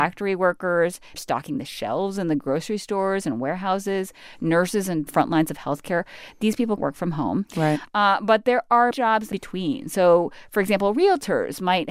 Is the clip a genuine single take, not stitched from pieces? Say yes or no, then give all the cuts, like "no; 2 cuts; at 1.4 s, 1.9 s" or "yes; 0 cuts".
no; 5 cuts; at 1.2 s, 5.1 s, 6.8 s, 8.9 s, 9.3 s